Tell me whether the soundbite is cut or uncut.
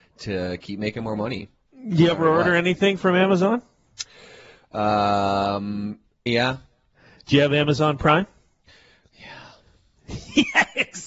cut